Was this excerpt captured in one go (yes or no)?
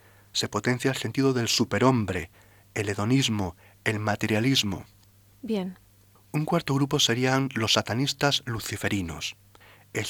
yes